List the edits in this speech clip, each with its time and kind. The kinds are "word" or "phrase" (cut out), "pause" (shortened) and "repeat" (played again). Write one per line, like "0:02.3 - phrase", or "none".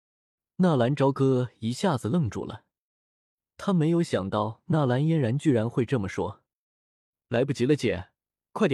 none